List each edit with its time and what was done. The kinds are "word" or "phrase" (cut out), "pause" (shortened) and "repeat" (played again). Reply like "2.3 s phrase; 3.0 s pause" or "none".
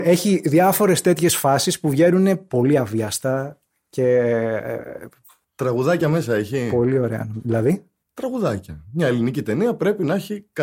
none